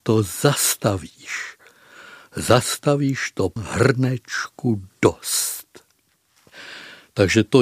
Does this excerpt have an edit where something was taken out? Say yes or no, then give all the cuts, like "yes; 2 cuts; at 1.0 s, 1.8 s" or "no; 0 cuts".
yes; 1 cut; at 3.6 s